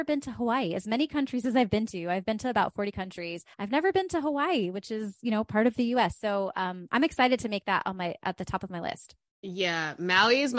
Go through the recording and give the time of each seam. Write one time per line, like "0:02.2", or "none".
0:03.5